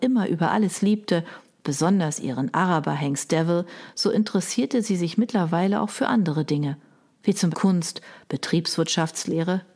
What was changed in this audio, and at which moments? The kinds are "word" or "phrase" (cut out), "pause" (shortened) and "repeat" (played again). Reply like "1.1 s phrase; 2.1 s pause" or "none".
7.5 s word